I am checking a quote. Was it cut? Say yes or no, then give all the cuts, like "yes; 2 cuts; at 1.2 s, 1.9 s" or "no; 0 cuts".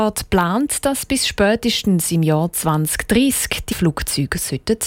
yes; 1 cut; at 3.7 s